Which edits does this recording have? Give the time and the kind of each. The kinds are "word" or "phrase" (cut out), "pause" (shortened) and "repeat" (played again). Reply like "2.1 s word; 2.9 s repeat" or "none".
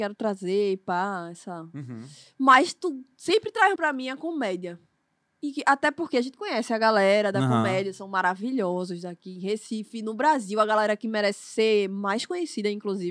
3.7 s word